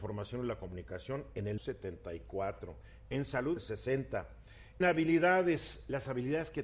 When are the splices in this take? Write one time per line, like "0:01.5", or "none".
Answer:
0:01.6
0:03.6
0:04.8